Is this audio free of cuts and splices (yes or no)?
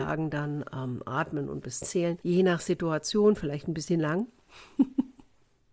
no